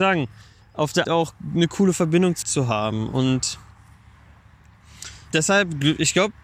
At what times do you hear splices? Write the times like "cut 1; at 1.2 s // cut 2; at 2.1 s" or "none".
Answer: cut 1; at 1.0 s // cut 2; at 2.4 s // cut 3; at 5.3 s